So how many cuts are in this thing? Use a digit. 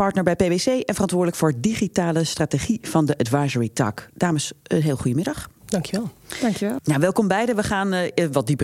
1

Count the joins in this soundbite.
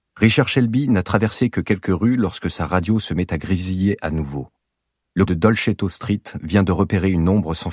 1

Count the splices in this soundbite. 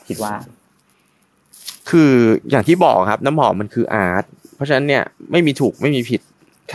1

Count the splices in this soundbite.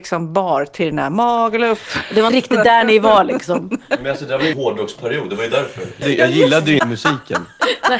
4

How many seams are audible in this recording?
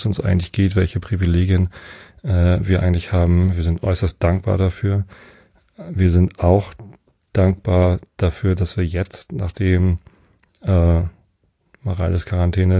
0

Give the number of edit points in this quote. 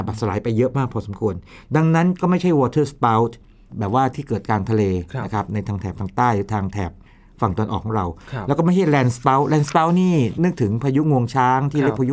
0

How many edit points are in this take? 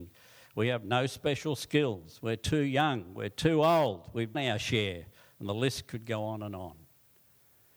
1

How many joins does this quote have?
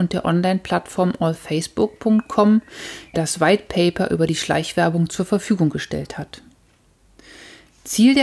1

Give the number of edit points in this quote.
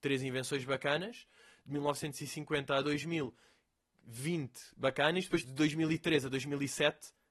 1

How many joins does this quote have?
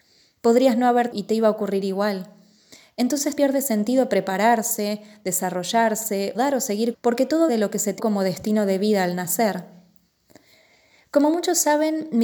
6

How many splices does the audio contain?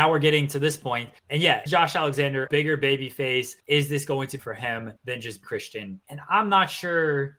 8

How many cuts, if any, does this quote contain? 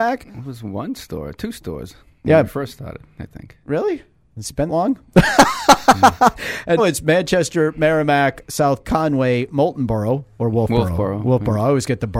3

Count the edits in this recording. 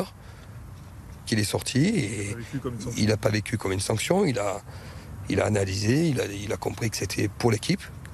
1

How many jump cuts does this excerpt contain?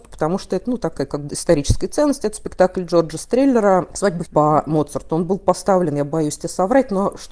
2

